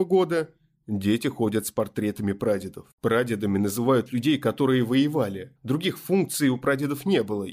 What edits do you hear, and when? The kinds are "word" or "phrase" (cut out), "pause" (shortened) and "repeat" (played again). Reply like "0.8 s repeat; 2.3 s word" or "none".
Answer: 2.9 s pause; 5.6 s pause